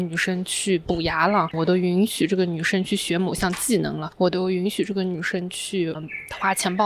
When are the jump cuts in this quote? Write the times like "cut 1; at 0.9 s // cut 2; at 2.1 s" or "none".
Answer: cut 1; at 5.9 s

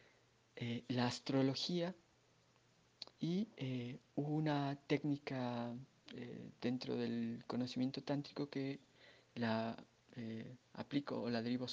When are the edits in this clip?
cut 1; at 3.1 s

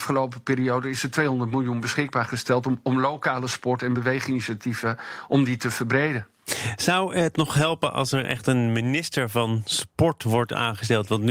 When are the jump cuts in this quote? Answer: none

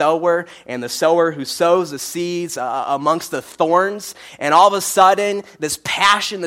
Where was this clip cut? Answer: none

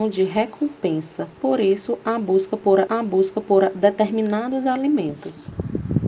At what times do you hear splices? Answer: cut 1; at 1.3 s // cut 2; at 2.9 s

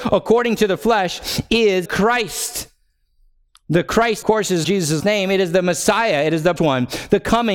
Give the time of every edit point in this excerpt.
cut 1; at 1.8 s // cut 2; at 4.2 s // cut 3; at 4.6 s // cut 4; at 5.0 s // cut 5; at 6.6 s

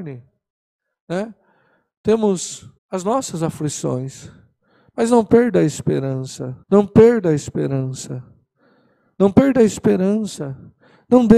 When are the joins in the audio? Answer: cut 1; at 2.8 s // cut 2; at 6.6 s

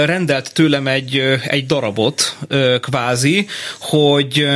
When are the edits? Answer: none

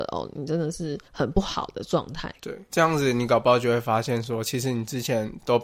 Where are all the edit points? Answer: cut 1; at 1.1 s // cut 2; at 2.7 s

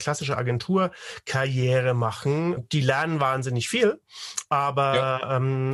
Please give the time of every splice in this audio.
cut 1; at 2.6 s

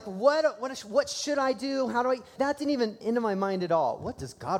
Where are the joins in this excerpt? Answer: cut 1; at 2.4 s // cut 2; at 3.0 s

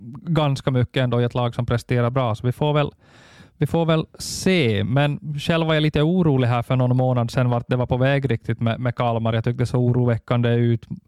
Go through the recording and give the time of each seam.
none

